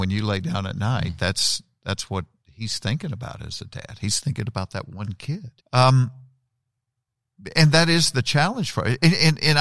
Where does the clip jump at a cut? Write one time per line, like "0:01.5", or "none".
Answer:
0:05.6